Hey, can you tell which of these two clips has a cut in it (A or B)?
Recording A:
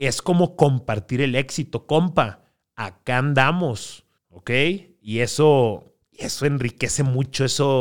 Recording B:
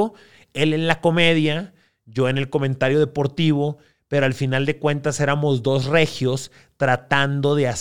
A